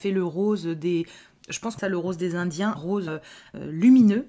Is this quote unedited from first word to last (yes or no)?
no